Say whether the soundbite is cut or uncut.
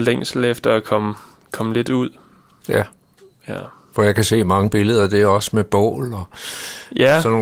uncut